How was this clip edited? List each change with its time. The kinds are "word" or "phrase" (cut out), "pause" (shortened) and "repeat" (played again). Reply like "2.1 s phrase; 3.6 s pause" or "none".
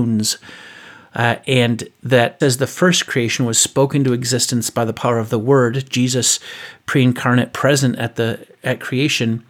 2.4 s word